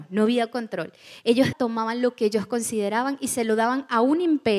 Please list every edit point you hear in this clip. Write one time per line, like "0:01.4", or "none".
0:01.5